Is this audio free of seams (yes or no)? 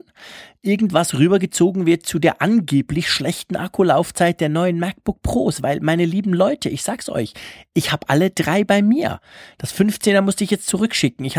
yes